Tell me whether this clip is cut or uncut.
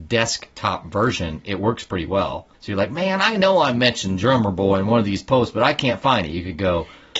cut